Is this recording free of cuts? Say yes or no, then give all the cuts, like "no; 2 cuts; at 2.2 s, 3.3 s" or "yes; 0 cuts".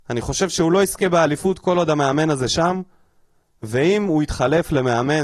yes; 0 cuts